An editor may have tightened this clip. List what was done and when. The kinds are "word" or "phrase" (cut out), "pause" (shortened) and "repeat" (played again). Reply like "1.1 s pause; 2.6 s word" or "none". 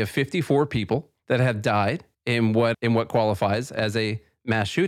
1.2 s pause; 2.1 s pause; 2.7 s word

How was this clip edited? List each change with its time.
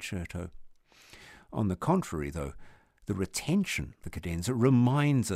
4.0 s word

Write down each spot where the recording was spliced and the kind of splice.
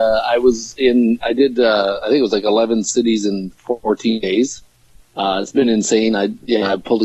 none

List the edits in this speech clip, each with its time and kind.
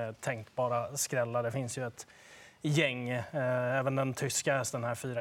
none

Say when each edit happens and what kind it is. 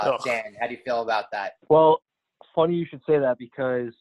1.6 s pause

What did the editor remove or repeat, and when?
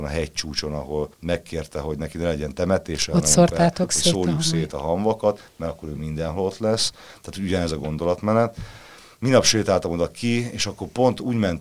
1.1 s pause; 9.0 s pause

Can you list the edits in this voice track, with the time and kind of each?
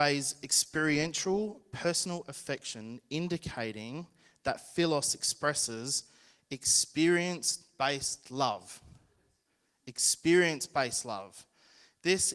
none

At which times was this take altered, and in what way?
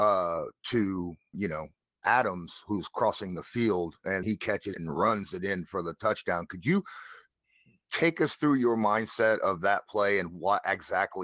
1.3 s word; 4.2 s word; 4.7 s word

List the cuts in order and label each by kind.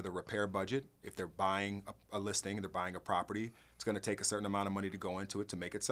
none

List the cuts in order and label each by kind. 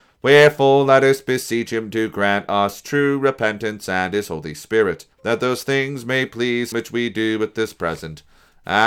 5.1 s pause; 6.7 s word

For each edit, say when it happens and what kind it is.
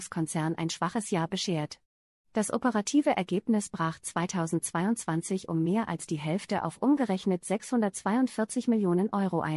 none

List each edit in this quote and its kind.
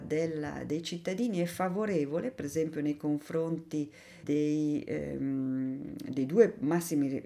4.2 s word

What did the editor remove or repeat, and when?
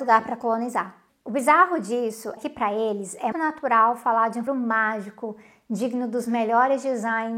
2.4 s word; 3.3 s word; 4.5 s word

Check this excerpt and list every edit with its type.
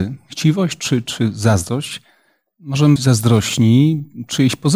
3.0 s word

